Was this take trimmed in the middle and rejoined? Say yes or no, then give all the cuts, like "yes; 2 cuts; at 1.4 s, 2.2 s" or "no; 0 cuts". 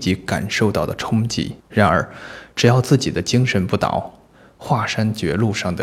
yes; 1 cut; at 1.6 s